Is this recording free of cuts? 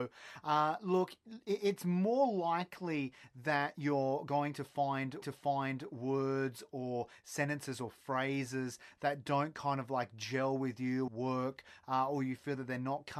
no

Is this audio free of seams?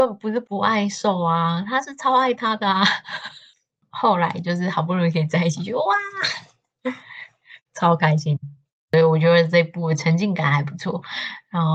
yes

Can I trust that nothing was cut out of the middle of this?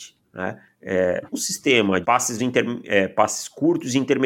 no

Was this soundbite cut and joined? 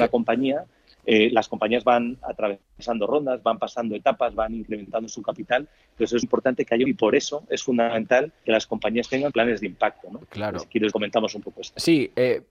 yes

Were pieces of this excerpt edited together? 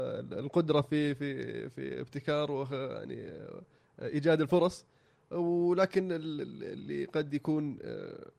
no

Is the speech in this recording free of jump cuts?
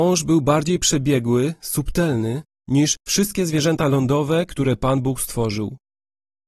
yes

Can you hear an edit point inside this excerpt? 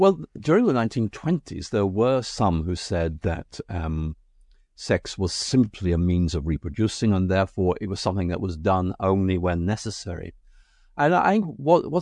no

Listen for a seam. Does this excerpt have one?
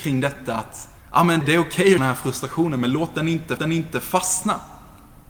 yes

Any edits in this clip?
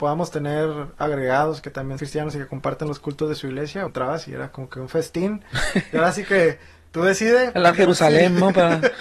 yes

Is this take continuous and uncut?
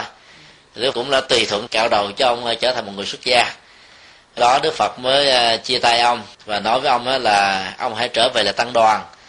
no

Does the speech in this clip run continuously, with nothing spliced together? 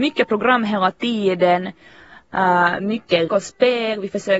no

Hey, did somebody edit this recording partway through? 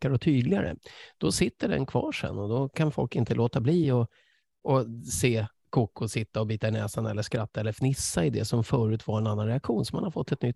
no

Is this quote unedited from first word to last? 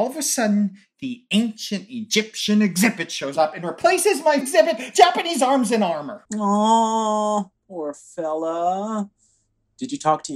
no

